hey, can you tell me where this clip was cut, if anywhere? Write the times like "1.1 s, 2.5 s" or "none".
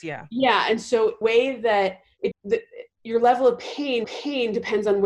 1.2 s, 2.3 s, 4.0 s

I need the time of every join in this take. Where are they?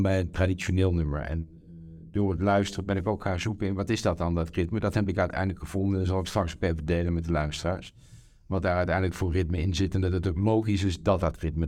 none

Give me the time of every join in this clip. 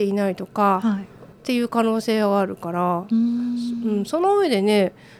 1.3 s

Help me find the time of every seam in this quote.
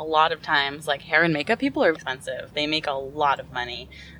1.9 s

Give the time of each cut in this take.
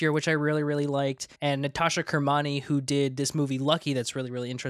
1.3 s

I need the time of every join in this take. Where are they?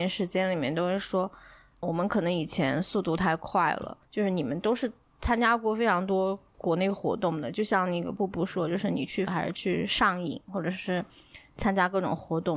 1.8 s, 4.0 s, 9.3 s

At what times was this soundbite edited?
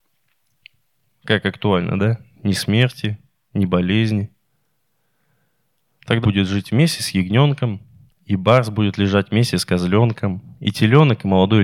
6.2 s

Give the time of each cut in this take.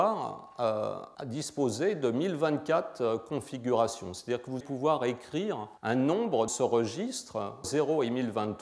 1.2 s, 4.6 s, 5.8 s, 6.5 s, 7.6 s

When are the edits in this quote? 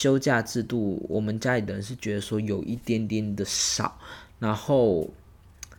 none

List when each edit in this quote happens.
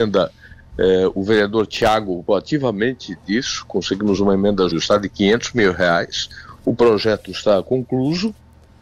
2.3 s, 4.7 s

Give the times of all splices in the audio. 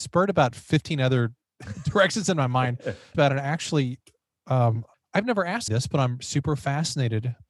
1.4 s, 3.1 s, 4.9 s, 5.7 s

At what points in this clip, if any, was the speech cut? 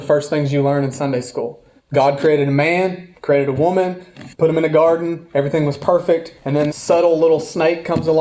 1.8 s, 4.3 s, 6.4 s, 6.7 s

